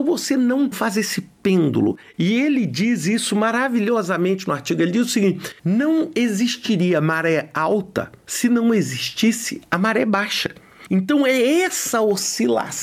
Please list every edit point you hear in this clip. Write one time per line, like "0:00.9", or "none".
0:05.6